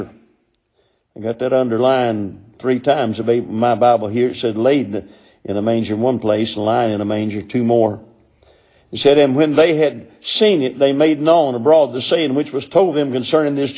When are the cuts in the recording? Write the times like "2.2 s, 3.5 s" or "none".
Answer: 3.2 s